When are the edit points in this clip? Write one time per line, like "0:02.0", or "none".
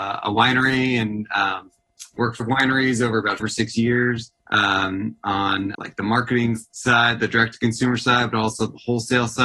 0:02.4
0:03.4
0:04.4
0:05.7